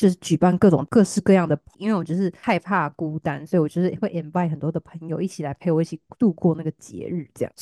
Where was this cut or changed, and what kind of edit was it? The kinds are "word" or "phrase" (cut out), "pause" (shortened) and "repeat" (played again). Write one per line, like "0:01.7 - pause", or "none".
0:01.7 - word